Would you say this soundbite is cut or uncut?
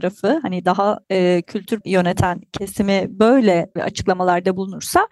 cut